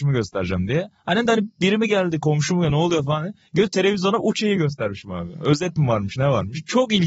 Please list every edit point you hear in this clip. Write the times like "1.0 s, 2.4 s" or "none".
none